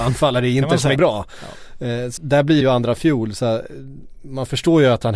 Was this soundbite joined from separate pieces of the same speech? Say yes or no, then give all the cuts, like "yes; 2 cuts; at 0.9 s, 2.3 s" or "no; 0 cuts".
yes; 3 cuts; at 1.0 s, 2.2 s, 2.6 s